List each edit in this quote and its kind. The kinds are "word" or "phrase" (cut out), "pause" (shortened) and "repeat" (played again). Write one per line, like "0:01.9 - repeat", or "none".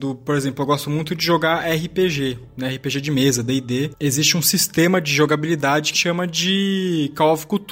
0:05.9 - phrase